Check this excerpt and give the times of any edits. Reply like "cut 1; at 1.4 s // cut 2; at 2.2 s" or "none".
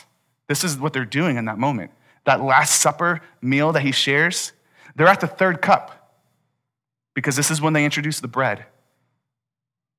none